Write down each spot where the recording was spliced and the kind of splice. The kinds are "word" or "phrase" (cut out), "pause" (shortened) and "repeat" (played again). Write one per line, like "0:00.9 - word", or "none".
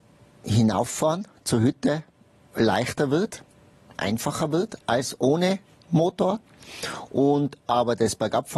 none